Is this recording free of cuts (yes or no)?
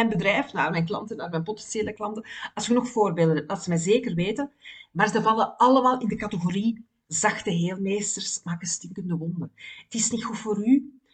yes